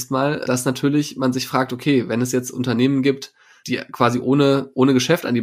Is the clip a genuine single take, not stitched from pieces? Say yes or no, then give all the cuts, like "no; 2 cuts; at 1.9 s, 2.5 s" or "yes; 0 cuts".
yes; 0 cuts